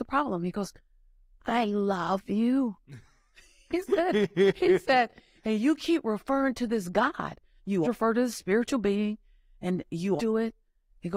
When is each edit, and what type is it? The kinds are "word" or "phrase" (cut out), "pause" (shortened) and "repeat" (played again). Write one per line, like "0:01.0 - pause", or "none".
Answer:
0:07.8 - word
0:10.2 - word